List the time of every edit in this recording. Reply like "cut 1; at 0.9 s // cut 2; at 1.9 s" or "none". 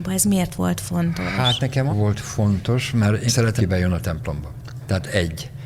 cut 1; at 1.9 s // cut 2; at 3.3 s // cut 3; at 3.6 s